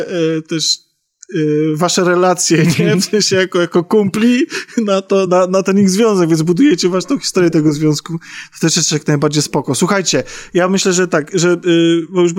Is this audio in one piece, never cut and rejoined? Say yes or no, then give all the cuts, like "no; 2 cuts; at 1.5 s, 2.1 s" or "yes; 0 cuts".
yes; 0 cuts